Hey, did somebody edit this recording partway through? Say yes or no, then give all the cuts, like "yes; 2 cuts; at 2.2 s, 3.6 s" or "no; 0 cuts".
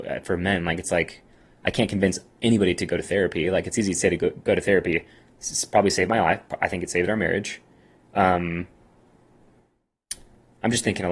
no; 0 cuts